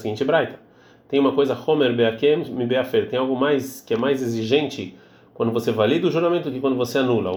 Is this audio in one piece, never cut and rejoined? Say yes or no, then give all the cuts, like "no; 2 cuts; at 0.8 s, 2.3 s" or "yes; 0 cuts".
yes; 0 cuts